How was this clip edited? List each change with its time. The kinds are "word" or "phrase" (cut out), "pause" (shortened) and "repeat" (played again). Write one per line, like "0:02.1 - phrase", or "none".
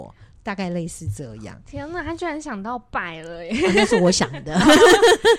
none